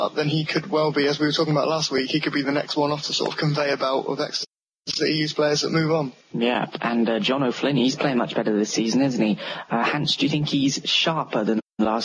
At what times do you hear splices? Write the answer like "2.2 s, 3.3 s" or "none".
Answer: 6.2 s